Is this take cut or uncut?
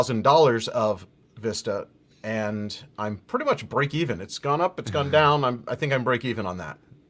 uncut